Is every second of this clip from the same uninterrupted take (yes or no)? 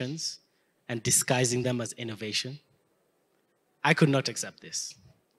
yes